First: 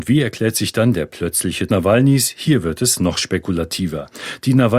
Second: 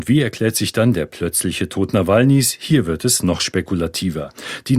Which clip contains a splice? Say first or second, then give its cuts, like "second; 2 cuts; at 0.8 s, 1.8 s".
first; 1 cut; at 1.7 s